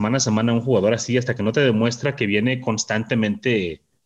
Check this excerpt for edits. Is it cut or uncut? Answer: uncut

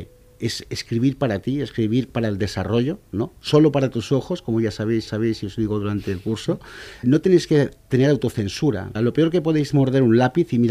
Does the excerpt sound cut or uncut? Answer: cut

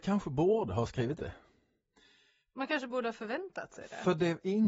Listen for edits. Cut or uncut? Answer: cut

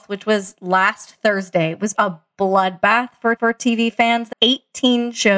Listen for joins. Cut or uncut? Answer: cut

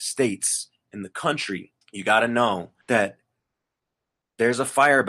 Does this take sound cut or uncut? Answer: cut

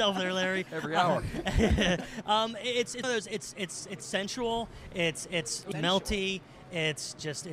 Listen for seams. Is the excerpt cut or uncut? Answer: cut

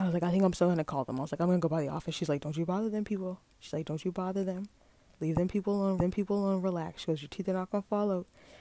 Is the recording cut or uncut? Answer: cut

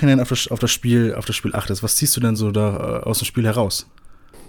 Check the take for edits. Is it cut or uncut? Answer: uncut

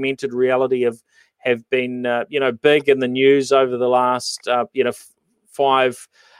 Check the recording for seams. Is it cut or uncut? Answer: uncut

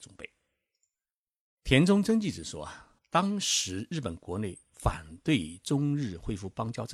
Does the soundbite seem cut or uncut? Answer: cut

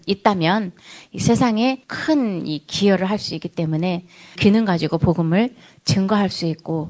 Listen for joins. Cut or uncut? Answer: cut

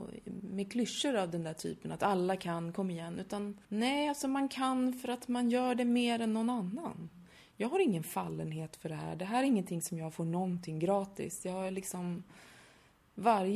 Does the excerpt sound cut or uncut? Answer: cut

